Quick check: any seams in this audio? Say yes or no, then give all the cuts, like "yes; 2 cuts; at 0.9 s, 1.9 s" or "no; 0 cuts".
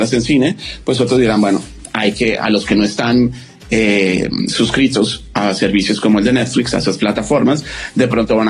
no; 0 cuts